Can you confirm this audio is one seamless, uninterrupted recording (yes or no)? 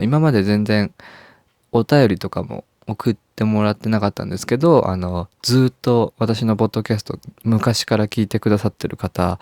yes